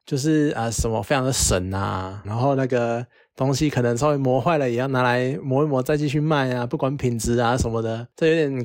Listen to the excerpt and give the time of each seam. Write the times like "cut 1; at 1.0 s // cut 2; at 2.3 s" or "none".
cut 1; at 2.2 s